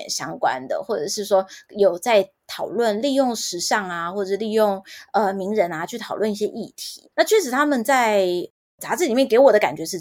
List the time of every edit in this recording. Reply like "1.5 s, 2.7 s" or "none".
7.1 s